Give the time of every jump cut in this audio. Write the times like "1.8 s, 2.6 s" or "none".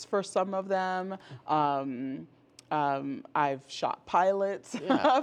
none